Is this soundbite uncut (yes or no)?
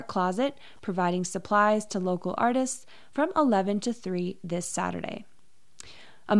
yes